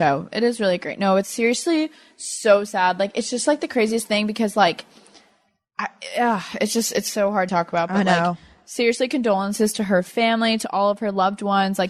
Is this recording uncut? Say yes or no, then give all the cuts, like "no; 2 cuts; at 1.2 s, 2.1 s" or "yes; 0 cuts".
no; 1 cut; at 7.5 s